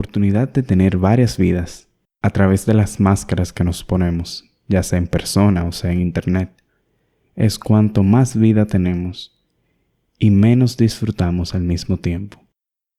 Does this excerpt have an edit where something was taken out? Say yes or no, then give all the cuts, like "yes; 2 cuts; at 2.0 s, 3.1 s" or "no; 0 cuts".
no; 0 cuts